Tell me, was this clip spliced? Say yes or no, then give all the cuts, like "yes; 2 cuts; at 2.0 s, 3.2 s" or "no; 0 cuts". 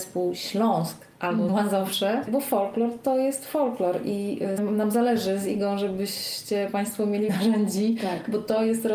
yes; 3 cuts; at 1.5 s, 4.6 s, 7.3 s